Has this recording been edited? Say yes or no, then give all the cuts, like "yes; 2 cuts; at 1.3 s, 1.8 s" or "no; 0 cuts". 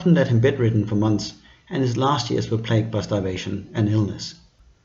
no; 0 cuts